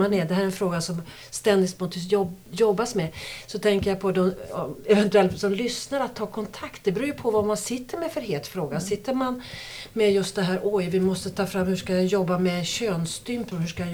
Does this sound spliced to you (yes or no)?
no